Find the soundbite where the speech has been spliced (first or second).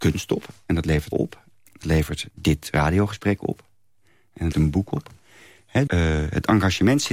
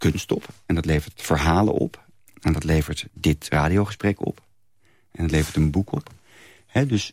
first